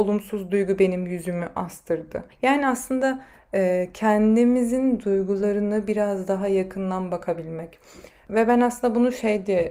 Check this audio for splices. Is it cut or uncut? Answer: cut